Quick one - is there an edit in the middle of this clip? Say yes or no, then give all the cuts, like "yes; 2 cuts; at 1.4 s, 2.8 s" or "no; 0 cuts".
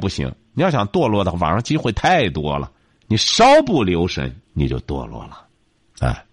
yes; 2 cuts; at 2.8 s, 4.4 s